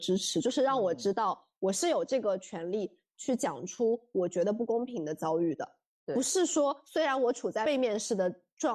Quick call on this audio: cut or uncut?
uncut